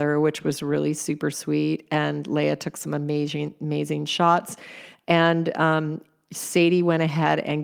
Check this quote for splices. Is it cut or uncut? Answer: uncut